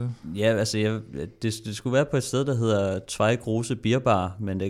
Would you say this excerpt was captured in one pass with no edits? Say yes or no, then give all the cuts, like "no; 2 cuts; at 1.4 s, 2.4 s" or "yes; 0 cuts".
yes; 0 cuts